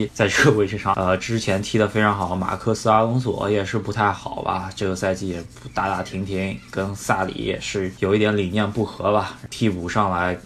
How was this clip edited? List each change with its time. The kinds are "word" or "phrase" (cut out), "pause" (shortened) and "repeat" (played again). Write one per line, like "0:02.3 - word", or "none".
0:00.9 - word

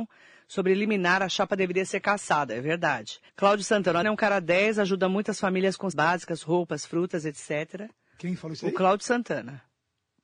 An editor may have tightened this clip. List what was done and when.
0:03.3 - pause
0:04.0 - word
0:05.9 - word

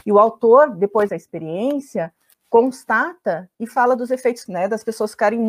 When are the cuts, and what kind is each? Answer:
0:01.1 - word
0:02.3 - word
0:03.5 - pause
0:04.5 - word

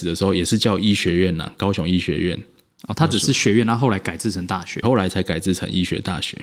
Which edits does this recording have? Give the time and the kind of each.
0:04.8 - word

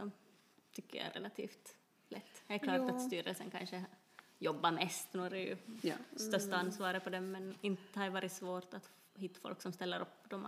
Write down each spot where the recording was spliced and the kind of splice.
0:01.8 - pause

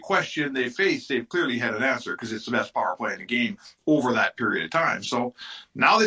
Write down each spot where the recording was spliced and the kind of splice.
none

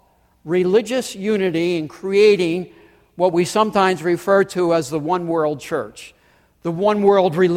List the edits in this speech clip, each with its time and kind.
none

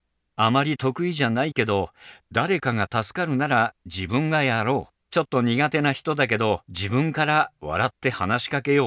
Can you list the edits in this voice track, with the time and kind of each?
0:05.0 - pause
0:06.6 - pause

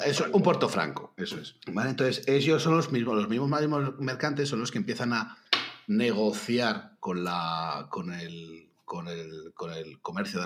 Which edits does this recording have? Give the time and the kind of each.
0:01.6 - pause

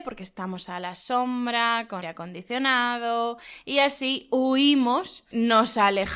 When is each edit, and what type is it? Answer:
0:02.0 - word

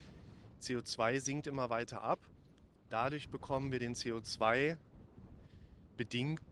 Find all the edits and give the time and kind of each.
none

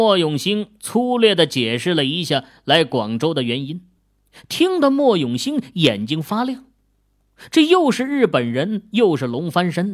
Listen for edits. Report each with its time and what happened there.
none

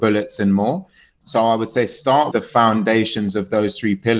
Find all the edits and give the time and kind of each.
0:02.3 - word

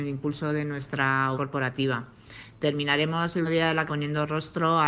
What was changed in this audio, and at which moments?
0:01.3 - word
0:03.4 - word
0:03.9 - word

